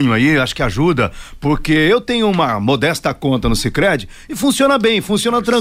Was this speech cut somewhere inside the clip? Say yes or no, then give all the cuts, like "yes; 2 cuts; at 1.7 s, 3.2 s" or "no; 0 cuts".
no; 0 cuts